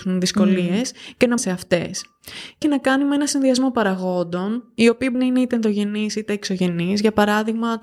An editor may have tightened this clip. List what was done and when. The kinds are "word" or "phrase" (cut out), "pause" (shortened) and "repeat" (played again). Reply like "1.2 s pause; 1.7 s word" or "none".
1.4 s phrase; 2.6 s phrase; 5.1 s word